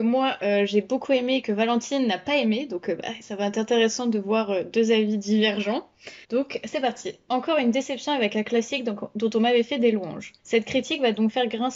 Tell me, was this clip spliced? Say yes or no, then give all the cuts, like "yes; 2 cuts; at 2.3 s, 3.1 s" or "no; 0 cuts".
yes; 2 cuts; at 6.2 s, 10.4 s